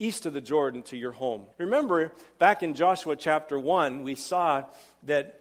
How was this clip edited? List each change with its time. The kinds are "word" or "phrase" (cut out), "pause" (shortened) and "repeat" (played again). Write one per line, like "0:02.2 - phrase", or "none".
0:01.5 - pause